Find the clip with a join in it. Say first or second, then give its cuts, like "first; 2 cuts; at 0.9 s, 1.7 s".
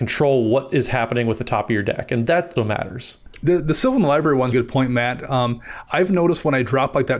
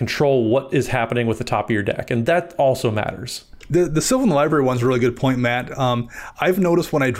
first; 2 cuts; at 2.6 s, 4.5 s